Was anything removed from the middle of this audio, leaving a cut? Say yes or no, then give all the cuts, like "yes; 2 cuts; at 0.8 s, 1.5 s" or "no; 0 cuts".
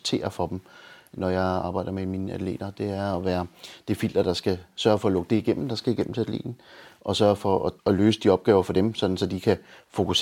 yes; 1 cut; at 7.8 s